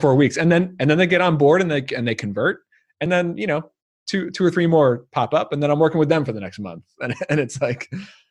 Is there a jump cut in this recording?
no; 0 cuts

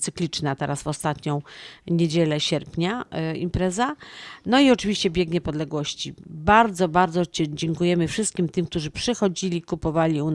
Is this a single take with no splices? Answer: yes; 0 cuts

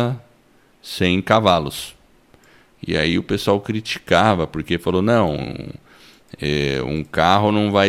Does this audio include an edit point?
no; 0 cuts

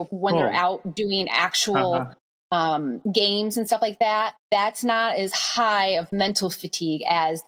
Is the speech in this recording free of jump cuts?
no; 1 cut; at 4.4 s

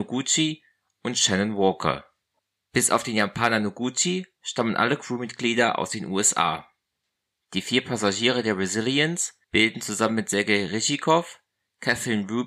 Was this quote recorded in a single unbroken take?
no; 2 cuts; at 2.4 s, 9.4 s

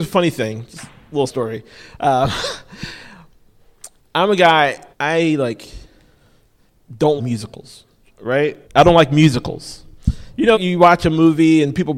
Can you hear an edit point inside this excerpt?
yes; 6 cuts; at 1.3 s, 4.0 s, 4.9 s, 7.2 s, 8.6 s, 10.5 s

